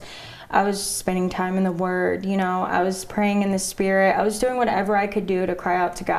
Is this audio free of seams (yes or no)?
yes